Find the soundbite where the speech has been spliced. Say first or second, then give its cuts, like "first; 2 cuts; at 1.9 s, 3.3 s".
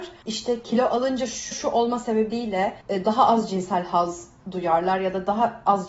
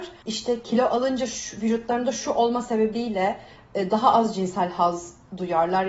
first; 2 cuts; at 1.5 s, 2.8 s